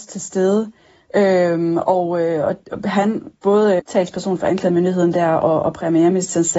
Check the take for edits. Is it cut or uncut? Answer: cut